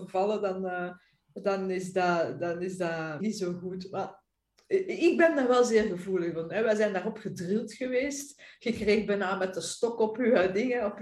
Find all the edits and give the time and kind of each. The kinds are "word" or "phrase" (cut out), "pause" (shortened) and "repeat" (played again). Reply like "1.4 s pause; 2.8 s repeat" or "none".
3.2 s word